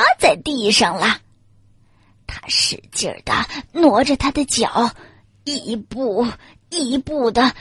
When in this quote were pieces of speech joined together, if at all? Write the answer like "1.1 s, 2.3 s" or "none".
none